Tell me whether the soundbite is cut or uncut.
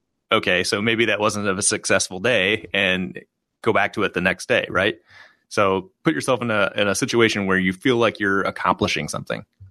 uncut